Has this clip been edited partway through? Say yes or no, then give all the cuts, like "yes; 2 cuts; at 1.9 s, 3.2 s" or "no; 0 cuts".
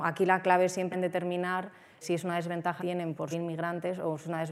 yes; 4 cuts; at 0.9 s, 2.0 s, 2.8 s, 3.3 s